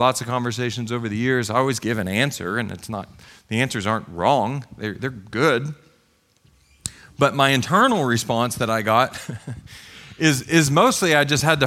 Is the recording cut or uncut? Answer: uncut